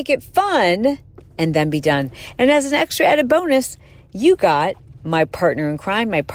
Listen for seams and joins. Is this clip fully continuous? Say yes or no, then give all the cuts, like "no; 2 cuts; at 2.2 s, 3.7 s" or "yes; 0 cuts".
yes; 0 cuts